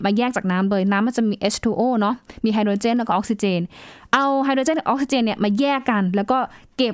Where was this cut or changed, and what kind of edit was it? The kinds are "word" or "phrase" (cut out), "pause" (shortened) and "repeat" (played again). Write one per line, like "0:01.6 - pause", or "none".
none